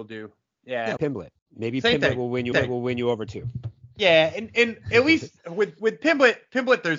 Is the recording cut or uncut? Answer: cut